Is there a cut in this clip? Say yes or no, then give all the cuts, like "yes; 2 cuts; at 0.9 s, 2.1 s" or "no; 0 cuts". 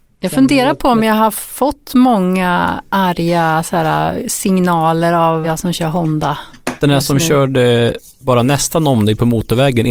yes; 1 cut; at 5.4 s